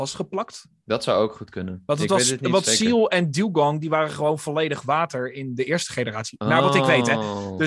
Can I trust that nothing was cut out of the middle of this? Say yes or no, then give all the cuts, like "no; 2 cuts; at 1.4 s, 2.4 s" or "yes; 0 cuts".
yes; 0 cuts